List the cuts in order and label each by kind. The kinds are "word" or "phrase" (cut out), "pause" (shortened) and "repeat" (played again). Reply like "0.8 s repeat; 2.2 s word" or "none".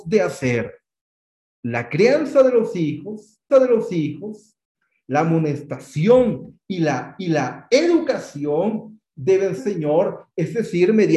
1.0 s pause; 3.5 s repeat; 7.2 s repeat; 9.6 s phrase